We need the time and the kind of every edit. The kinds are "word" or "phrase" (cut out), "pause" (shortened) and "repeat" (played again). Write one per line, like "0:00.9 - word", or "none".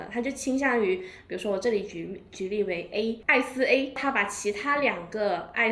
none